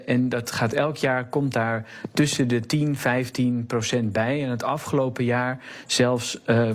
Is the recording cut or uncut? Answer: uncut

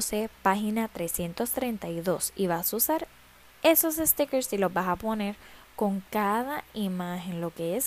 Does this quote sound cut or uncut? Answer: uncut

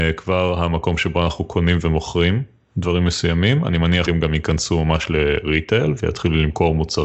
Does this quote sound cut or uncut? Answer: cut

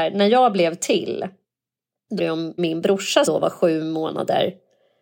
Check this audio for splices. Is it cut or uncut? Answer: cut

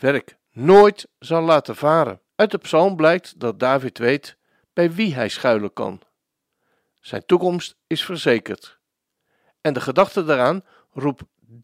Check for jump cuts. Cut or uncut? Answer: cut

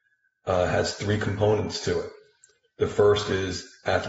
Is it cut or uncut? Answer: uncut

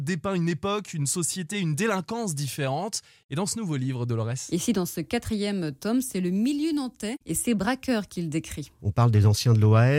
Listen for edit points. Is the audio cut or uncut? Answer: uncut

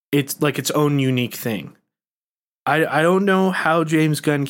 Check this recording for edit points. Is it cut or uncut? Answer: uncut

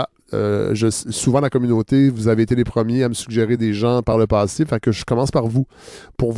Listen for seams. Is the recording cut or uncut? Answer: uncut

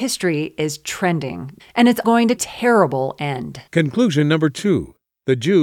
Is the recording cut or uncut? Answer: cut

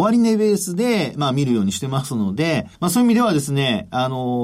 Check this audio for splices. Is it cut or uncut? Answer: cut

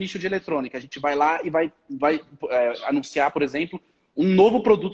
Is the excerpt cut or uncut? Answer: uncut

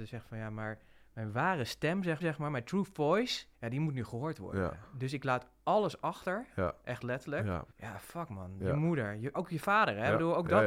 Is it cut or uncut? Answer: cut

